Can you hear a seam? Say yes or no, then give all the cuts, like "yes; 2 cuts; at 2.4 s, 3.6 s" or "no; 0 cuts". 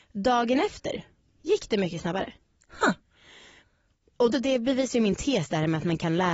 yes; 1 cut; at 4.3 s